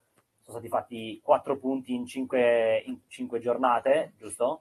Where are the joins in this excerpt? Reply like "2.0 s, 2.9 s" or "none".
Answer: none

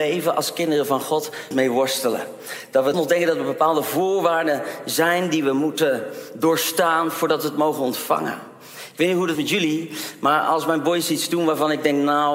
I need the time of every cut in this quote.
1.5 s, 2.9 s, 9.3 s

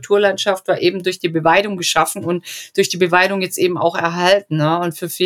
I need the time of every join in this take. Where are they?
none

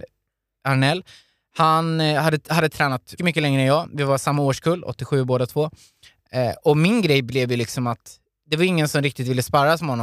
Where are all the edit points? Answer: 3.2 s

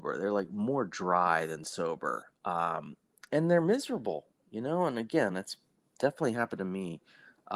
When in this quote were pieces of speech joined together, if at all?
none

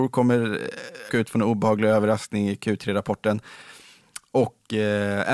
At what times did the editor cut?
1.1 s

